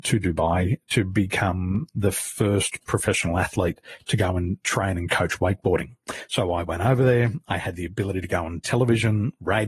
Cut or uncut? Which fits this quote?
uncut